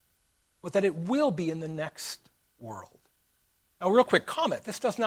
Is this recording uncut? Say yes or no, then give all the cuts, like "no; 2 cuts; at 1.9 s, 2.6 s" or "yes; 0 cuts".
yes; 0 cuts